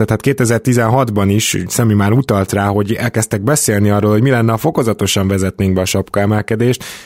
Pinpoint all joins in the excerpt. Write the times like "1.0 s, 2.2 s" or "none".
none